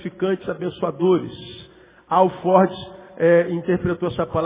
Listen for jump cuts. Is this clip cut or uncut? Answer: uncut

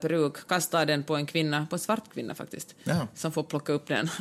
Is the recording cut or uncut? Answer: uncut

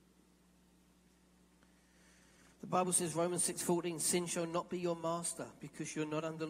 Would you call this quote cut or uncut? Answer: uncut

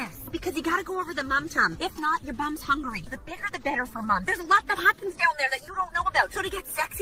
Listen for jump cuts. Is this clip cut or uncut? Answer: uncut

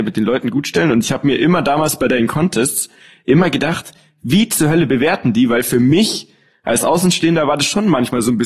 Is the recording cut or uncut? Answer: uncut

